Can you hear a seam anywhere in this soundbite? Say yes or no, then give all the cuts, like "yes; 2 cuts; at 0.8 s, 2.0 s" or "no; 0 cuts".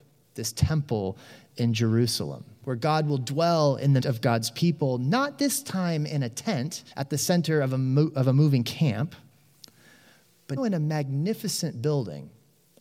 yes; 3 cuts; at 4.0 s, 6.9 s, 10.6 s